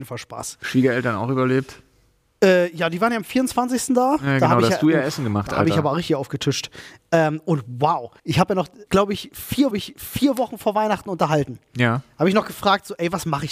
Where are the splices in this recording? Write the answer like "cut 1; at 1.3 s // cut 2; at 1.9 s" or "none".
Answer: cut 1; at 8.2 s // cut 2; at 8.9 s // cut 3; at 9.7 s